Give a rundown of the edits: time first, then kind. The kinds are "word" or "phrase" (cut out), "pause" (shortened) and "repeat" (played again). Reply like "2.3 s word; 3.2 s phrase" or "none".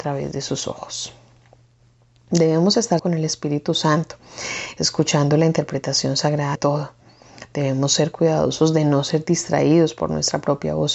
3.0 s phrase; 6.6 s word